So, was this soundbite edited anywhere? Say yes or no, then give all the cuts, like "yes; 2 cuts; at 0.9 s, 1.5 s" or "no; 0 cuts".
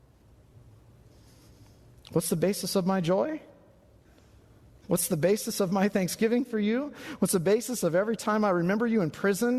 no; 0 cuts